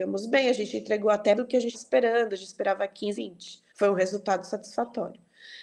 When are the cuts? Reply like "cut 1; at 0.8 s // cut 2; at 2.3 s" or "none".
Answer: cut 1; at 1.3 s // cut 2; at 1.7 s // cut 3; at 3.1 s // cut 4; at 3.7 s